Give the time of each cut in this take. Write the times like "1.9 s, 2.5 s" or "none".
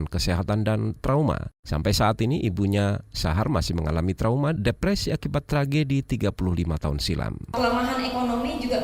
4.6 s

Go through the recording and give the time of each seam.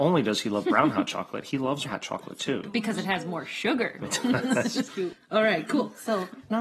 1.8 s, 4.9 s

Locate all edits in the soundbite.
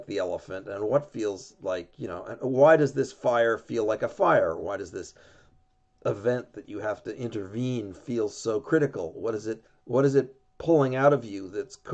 9.7 s

